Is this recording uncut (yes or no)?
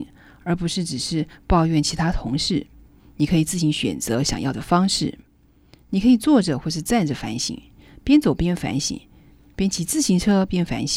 yes